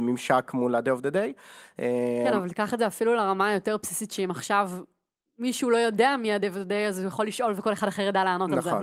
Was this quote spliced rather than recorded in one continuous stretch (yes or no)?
no